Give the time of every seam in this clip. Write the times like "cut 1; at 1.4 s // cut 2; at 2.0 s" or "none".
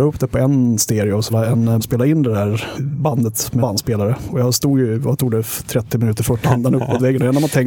cut 1; at 1.3 s // cut 2; at 1.8 s // cut 3; at 2.7 s // cut 4; at 3.6 s // cut 5; at 6.4 s